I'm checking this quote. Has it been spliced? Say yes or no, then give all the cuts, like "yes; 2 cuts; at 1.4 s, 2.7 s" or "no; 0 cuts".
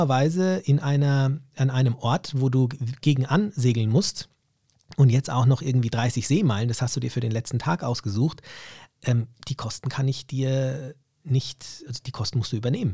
yes; 1 cut; at 11.9 s